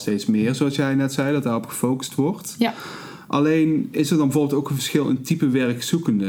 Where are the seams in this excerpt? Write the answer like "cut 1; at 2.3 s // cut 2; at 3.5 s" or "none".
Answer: none